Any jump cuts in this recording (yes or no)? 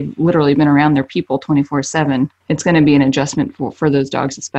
yes